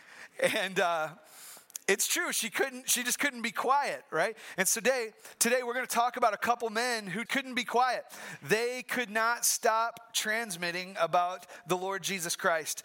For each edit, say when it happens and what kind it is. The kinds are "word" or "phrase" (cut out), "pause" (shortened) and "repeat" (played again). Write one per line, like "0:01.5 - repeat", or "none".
0:07.3 - word